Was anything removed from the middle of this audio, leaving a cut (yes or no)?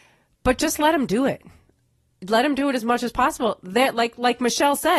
no